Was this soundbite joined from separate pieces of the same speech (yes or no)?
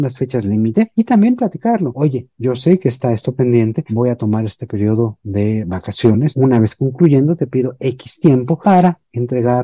no